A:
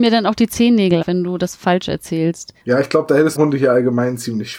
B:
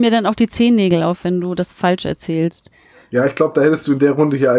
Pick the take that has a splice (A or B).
A